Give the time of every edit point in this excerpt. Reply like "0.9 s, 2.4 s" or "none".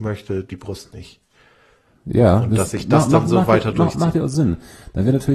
none